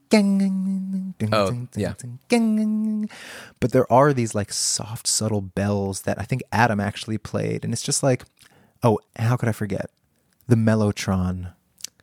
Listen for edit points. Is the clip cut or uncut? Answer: cut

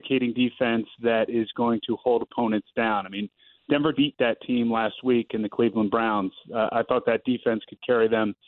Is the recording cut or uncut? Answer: cut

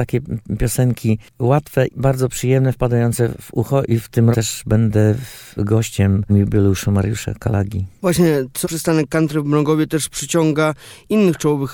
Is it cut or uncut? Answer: cut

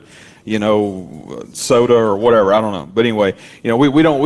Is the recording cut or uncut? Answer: uncut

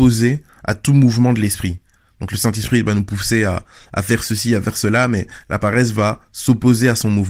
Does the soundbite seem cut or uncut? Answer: uncut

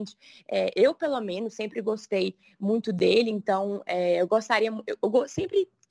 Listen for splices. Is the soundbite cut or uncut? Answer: uncut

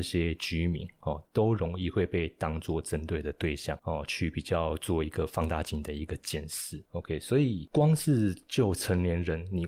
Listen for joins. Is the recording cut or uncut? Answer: uncut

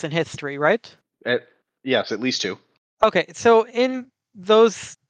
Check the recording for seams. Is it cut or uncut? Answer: uncut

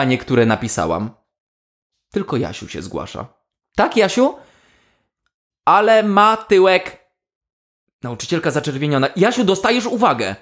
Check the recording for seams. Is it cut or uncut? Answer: uncut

